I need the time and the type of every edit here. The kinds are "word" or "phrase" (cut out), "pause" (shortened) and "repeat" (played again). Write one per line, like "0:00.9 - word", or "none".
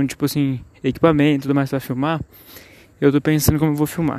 none